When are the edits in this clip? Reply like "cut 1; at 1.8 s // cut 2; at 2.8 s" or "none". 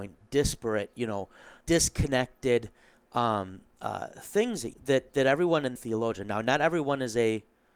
cut 1; at 1.6 s // cut 2; at 4.7 s // cut 3; at 5.8 s